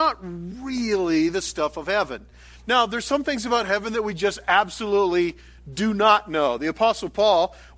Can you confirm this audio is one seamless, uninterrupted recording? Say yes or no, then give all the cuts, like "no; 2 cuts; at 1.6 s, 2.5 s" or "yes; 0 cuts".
yes; 0 cuts